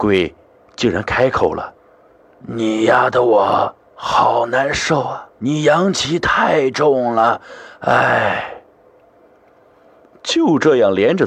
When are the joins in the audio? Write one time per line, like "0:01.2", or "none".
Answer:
0:01.8
0:03.9
0:05.3